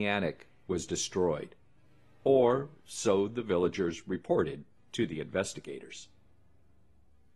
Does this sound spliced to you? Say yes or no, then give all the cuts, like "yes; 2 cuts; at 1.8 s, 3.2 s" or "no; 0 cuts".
no; 0 cuts